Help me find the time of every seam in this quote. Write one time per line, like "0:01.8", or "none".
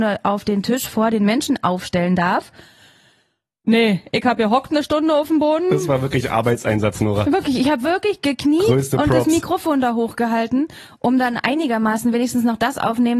none